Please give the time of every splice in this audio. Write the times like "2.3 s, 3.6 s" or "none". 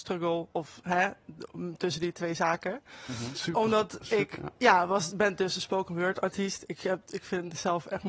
4.6 s